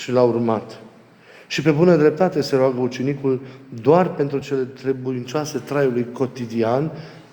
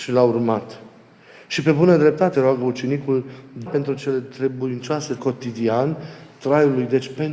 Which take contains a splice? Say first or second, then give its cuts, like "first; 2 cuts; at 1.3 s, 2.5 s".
second; 3 cuts; at 2.3 s, 3.7 s, 5.2 s